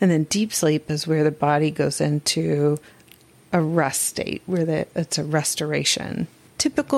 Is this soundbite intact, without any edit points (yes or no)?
yes